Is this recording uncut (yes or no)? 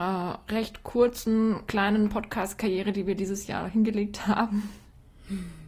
yes